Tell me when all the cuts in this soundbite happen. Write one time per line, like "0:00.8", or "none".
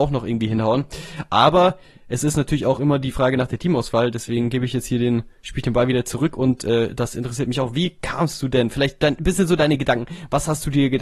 none